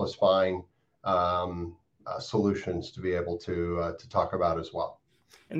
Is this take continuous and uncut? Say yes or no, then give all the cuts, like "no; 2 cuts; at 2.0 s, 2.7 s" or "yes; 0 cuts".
yes; 0 cuts